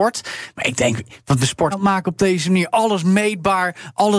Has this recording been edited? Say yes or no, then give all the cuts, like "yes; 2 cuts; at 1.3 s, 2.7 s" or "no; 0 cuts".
yes; 2 cuts; at 1.4 s, 1.7 s